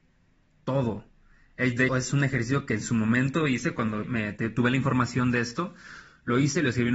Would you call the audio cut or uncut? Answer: cut